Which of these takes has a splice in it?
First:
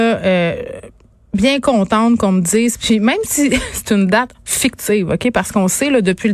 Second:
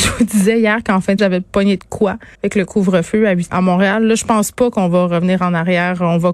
second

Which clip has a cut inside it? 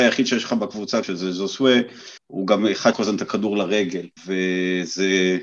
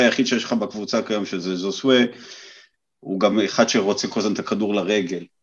first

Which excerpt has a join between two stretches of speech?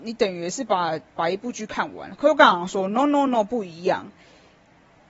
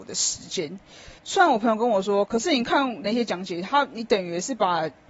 second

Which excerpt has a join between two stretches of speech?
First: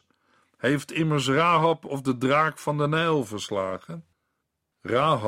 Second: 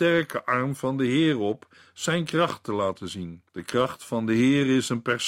second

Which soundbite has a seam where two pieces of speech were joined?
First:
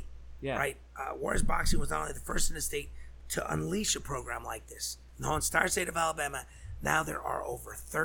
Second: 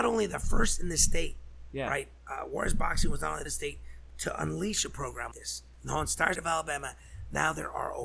second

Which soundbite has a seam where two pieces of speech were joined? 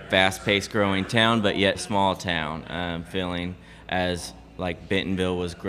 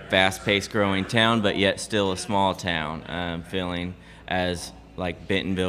first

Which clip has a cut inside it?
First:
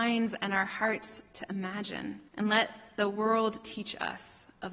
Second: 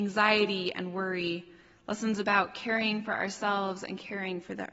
first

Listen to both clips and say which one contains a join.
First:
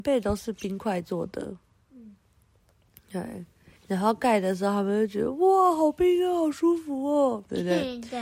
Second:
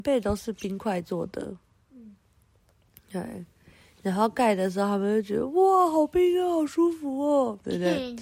first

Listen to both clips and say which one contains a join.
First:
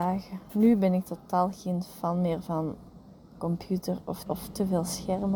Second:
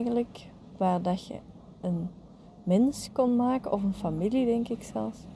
first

